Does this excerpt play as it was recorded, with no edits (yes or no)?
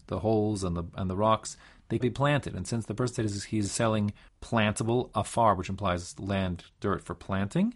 no